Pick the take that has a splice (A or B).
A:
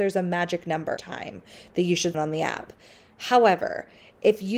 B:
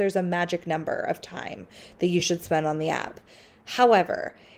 A